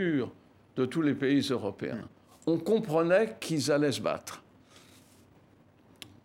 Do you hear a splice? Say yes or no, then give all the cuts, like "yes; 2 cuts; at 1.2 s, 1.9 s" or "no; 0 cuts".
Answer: no; 0 cuts